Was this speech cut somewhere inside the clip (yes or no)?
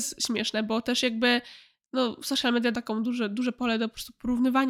yes